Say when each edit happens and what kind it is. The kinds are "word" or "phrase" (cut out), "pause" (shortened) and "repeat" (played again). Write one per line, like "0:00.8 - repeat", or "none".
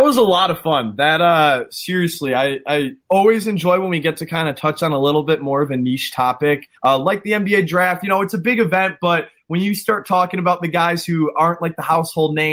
0:03.0 - pause
0:06.8 - pause